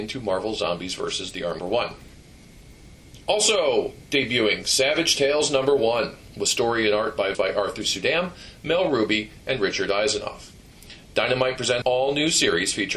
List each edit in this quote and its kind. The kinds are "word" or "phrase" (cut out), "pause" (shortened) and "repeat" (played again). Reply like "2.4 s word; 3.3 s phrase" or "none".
1.6 s phrase; 7.3 s phrase; 11.8 s word